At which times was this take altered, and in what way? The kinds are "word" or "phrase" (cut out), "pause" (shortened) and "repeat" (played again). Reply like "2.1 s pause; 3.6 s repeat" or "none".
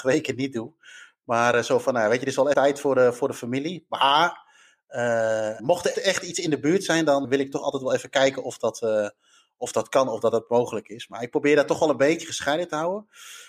2.5 s word; 5.6 s word; 5.9 s word; 7.2 s word